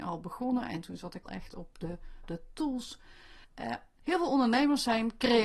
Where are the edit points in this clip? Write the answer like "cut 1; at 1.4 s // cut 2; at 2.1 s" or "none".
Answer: cut 1; at 1.3 s // cut 2; at 2.2 s // cut 3; at 3.4 s